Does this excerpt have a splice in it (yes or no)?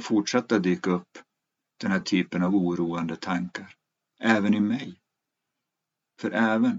no